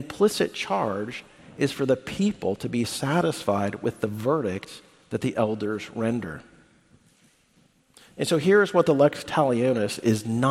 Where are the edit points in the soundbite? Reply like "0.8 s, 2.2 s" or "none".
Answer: none